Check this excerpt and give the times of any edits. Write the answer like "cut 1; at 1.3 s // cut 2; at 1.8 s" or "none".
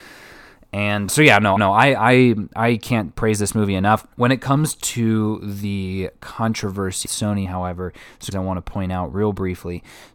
cut 1; at 1.1 s // cut 2; at 1.6 s // cut 3; at 4.1 s // cut 4; at 7.1 s // cut 5; at 7.5 s // cut 6; at 8.3 s